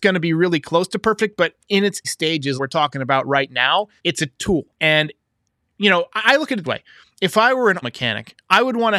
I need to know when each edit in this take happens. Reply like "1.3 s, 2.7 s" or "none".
2.0 s, 2.6 s, 4.0 s, 4.7 s, 6.6 s, 7.8 s